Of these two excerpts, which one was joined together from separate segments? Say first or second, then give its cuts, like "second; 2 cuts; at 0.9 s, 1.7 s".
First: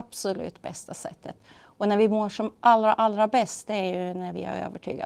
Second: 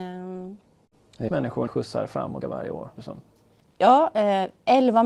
second; 4 cuts; at 1.3 s, 1.7 s, 2.4 s, 3.0 s